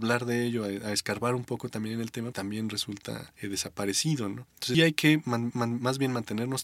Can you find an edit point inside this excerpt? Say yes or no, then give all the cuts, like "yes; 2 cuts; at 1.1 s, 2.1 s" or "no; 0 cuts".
yes; 3 cuts; at 2.3 s, 4.7 s, 5.5 s